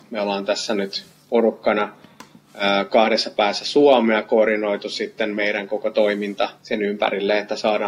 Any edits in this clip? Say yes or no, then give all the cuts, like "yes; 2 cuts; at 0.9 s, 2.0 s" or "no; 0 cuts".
yes; 1 cut; at 6.5 s